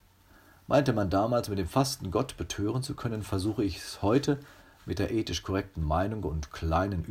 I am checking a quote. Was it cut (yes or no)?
no